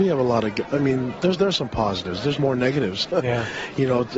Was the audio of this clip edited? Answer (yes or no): yes